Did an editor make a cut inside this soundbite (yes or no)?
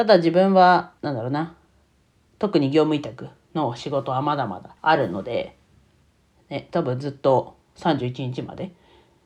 yes